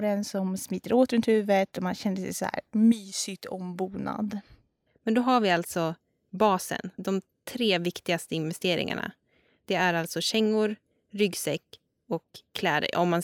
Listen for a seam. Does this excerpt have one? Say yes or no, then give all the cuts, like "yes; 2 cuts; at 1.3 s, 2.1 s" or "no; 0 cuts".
no; 0 cuts